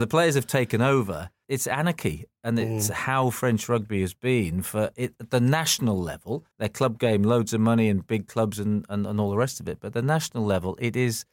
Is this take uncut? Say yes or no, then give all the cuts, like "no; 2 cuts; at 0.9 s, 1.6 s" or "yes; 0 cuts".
no; 1 cut; at 6.5 s